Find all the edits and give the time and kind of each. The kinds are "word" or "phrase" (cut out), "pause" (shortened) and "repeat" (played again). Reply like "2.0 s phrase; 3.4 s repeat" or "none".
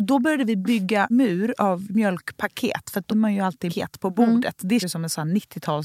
1.1 s word; 3.1 s word; 3.7 s word; 4.8 s word